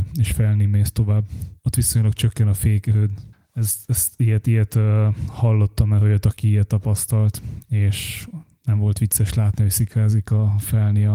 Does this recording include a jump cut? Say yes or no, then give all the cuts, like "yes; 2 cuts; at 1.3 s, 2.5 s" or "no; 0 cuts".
yes; 1 cut; at 1.6 s